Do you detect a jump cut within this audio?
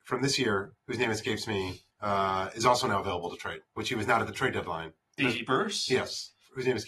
yes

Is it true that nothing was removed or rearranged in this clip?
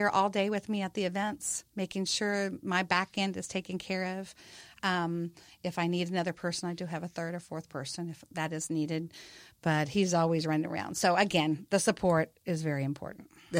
yes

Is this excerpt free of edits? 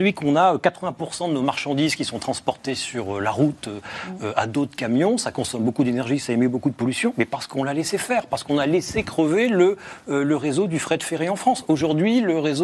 yes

